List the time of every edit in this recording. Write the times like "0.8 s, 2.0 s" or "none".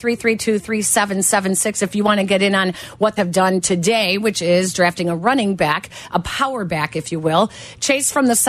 3.2 s